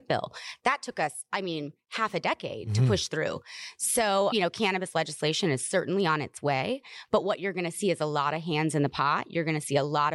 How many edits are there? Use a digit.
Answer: 1